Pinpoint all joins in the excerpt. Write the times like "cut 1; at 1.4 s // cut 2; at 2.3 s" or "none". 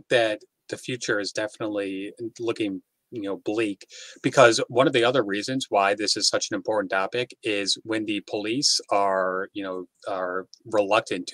cut 1; at 9.9 s